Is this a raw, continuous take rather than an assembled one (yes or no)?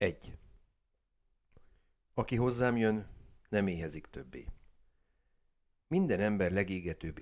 yes